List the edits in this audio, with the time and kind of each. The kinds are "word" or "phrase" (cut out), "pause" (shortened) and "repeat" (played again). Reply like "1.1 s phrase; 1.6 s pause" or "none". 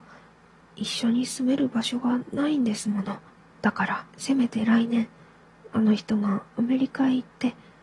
3.3 s pause; 4.1 s pause